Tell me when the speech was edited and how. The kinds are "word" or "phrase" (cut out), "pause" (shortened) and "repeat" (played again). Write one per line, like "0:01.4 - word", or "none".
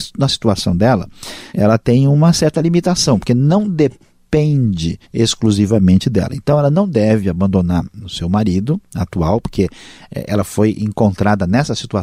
0:01.5 - pause
0:05.0 - pause
0:08.9 - pause